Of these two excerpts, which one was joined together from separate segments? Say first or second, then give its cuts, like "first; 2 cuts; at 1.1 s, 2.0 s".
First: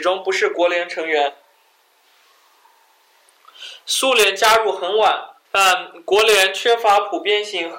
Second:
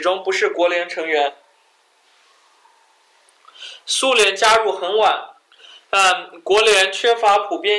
first; 1 cut; at 5.5 s